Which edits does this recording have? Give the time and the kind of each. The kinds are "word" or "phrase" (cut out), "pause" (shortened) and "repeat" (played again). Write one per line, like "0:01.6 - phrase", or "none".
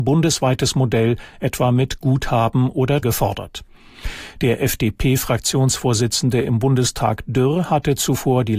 0:03.0 - word